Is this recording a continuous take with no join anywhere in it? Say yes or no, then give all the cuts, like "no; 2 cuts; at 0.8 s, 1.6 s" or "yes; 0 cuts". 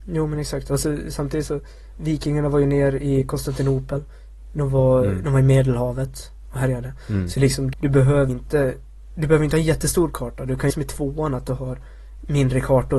no; 3 cuts; at 7.7 s, 8.3 s, 10.7 s